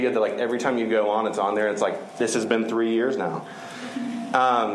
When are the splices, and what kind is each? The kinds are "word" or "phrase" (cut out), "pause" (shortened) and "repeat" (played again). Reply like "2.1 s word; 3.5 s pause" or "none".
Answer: none